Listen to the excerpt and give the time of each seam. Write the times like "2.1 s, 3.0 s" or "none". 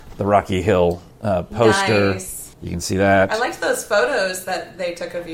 2.5 s